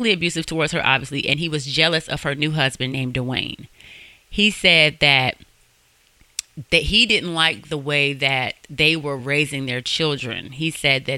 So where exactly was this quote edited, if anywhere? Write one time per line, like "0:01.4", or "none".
none